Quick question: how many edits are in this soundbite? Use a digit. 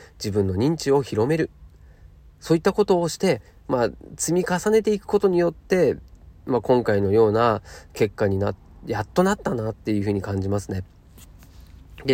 0